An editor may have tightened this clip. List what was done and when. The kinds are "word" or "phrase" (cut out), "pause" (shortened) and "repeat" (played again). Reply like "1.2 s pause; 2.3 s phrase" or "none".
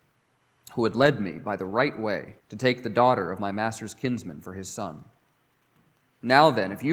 2.4 s pause